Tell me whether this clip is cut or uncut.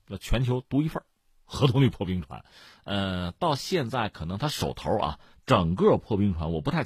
uncut